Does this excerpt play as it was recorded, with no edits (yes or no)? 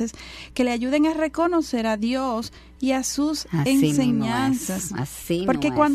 yes